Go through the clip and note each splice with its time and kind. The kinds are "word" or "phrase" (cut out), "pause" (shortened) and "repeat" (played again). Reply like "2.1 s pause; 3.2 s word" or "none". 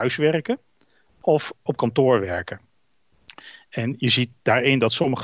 1.7 s word